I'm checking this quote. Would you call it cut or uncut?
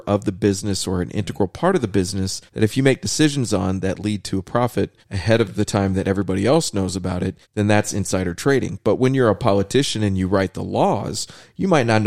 cut